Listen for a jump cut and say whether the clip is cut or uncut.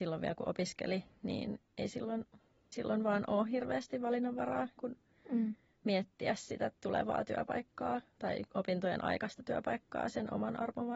cut